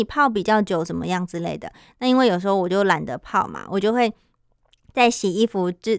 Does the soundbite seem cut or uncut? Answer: uncut